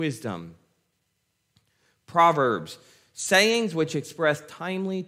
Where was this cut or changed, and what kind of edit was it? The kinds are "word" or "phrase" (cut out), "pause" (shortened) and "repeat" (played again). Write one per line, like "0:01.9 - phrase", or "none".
none